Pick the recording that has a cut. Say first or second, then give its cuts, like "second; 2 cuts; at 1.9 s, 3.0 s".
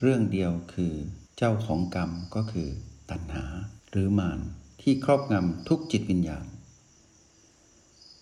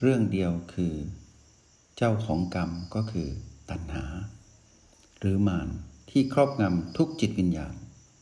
first; 2 cuts; at 1.3 s, 3.8 s